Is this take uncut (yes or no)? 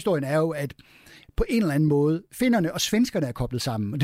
yes